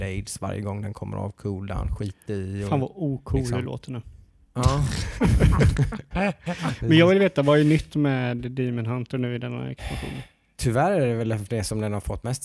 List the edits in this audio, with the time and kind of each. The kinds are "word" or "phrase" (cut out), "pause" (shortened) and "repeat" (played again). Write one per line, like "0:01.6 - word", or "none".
none